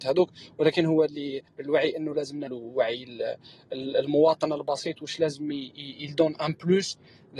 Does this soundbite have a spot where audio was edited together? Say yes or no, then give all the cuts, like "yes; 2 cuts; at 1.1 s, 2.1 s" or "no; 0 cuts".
yes; 3 cuts; at 1.1 s, 1.5 s, 2.5 s